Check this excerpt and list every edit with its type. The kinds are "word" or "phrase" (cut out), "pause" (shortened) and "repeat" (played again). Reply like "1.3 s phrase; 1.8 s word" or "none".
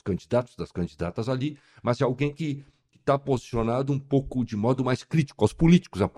none